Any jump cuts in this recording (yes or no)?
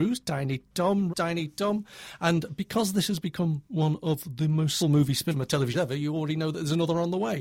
yes